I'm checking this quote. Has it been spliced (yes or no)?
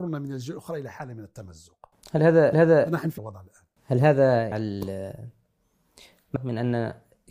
yes